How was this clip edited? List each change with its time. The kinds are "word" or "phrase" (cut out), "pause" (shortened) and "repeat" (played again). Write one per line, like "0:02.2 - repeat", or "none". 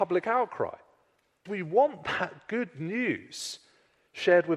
0:01.5 - word